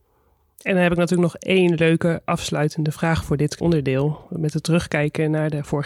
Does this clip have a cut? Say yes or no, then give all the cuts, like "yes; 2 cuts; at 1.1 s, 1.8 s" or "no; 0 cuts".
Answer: yes; 1 cut; at 3.6 s